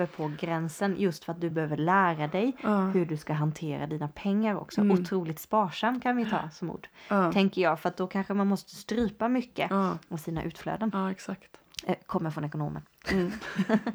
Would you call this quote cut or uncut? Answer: uncut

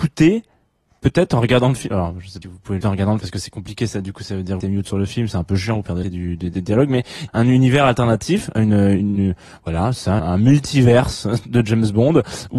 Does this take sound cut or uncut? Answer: cut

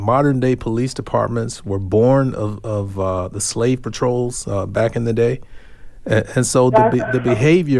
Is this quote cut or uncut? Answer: uncut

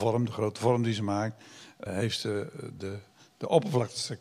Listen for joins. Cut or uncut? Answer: cut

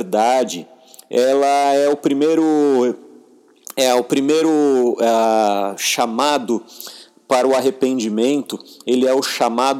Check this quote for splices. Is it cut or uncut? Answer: uncut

